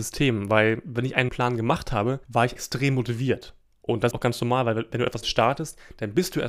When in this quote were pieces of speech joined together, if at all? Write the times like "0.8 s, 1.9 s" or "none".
1.3 s, 2.2 s, 2.6 s, 3.6 s, 4.1 s, 5.2 s